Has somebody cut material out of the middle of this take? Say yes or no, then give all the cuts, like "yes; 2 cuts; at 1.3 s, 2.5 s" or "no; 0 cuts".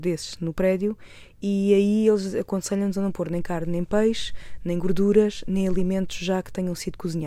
no; 0 cuts